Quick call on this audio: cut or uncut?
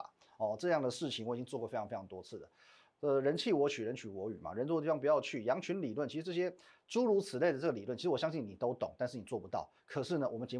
uncut